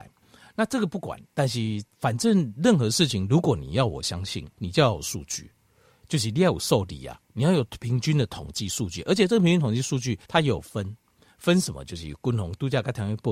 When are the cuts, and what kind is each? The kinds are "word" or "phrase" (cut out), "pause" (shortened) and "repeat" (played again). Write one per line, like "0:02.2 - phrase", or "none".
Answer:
0:01.9 - pause
0:04.5 - pause
0:07.2 - pause
0:10.2 - pause